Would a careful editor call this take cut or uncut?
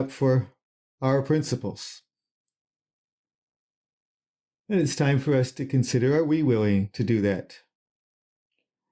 uncut